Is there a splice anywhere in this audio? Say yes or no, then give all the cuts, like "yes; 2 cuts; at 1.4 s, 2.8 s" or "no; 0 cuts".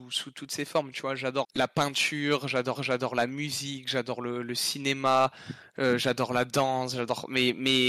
yes; 2 cuts; at 1.4 s, 2.8 s